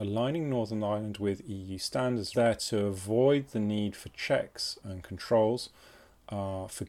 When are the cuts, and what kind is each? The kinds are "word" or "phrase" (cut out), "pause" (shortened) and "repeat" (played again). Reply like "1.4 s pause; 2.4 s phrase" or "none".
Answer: 2.3 s phrase; 4.8 s word

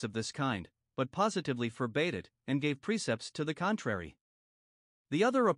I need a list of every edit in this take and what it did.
none

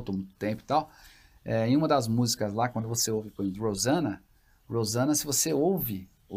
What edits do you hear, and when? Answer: none

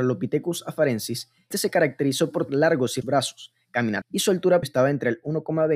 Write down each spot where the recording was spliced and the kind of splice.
1.5 s word; 2.5 s word; 3.0 s word; 4.0 s word; 4.6 s word

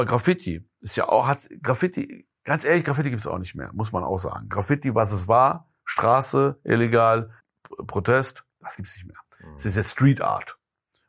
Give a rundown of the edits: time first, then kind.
2.4 s pause; 7.4 s pause

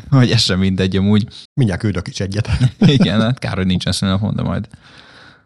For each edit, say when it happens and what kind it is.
1.4 s pause

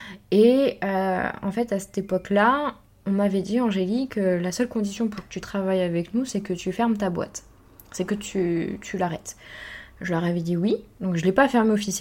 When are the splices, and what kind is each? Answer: none

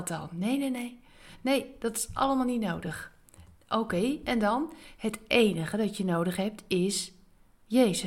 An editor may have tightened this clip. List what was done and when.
none

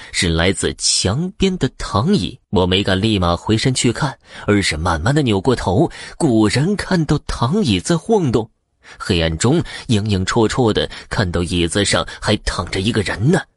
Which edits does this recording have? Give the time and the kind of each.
2.4 s pause

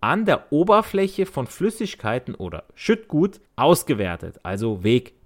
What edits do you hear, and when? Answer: 3.5 s pause

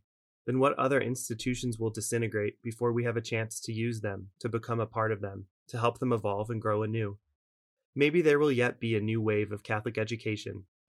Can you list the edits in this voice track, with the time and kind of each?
none

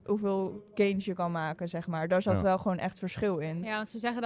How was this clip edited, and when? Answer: none

